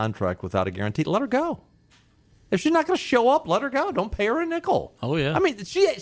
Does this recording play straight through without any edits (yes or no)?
yes